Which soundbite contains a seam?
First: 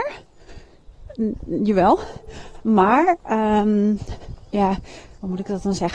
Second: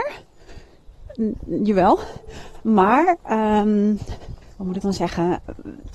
second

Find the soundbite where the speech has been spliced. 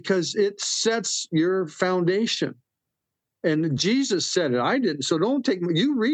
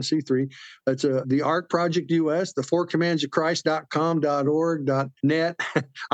second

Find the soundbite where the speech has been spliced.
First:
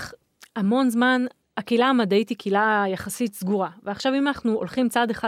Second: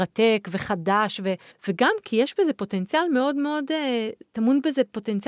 second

